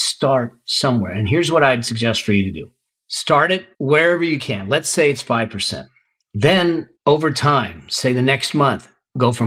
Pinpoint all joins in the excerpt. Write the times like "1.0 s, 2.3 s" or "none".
2.9 s, 3.7 s, 7.0 s